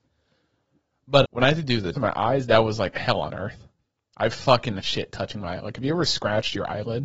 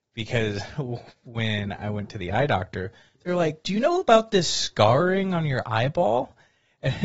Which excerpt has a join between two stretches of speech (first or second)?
first